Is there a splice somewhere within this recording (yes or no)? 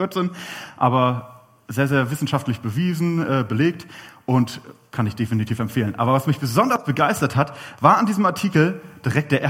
no